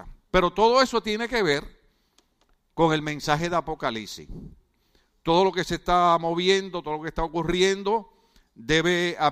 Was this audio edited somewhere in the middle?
no; 0 cuts

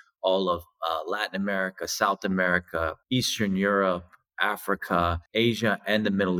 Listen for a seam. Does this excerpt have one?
no; 0 cuts

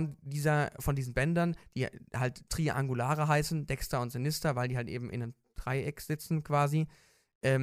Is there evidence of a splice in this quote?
no; 0 cuts

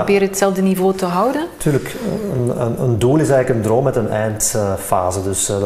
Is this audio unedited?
yes; 0 cuts

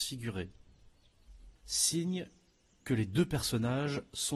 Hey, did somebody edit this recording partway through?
yes; 1 cut; at 1.6 s

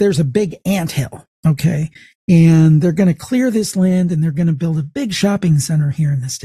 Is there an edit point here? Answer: yes; 1 cut; at 1.3 s

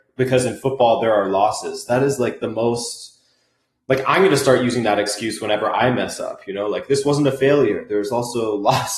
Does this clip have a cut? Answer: no; 0 cuts

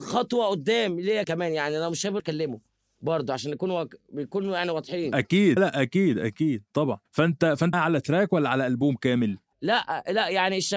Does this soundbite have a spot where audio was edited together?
yes; 5 cuts; at 1.2 s, 2.2 s, 5.6 s, 7.1 s, 7.7 s

